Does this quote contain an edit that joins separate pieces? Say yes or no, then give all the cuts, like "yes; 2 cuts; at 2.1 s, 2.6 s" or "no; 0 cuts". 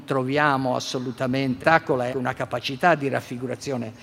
yes; 2 cuts; at 1.6 s, 2.1 s